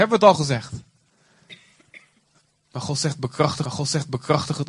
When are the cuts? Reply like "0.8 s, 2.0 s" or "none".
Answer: 3.6 s